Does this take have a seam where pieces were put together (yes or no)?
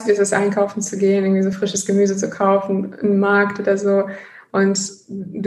no